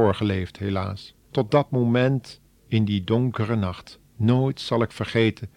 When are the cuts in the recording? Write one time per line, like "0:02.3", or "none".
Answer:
0:01.2
0:04.0